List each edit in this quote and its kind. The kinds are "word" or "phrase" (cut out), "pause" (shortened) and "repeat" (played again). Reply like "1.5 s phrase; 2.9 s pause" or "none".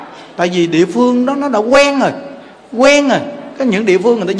2.5 s pause